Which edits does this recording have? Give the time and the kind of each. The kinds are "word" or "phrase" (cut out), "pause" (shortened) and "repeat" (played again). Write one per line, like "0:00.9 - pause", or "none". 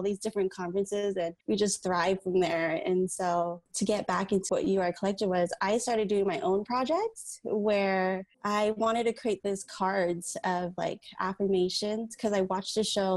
0:01.4 - pause
0:03.7 - word
0:04.5 - word
0:08.3 - pause